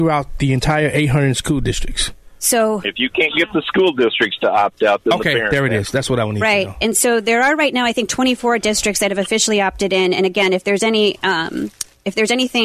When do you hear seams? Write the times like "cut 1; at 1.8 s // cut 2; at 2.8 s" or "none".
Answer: none